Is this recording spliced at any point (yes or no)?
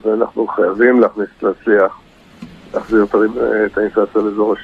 no